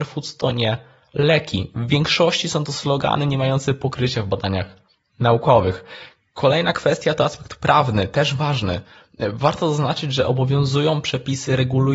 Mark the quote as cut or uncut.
uncut